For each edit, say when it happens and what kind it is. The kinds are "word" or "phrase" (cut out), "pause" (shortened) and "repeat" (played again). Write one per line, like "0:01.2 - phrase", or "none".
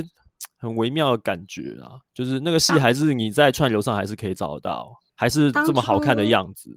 0:02.1 - pause
0:05.1 - pause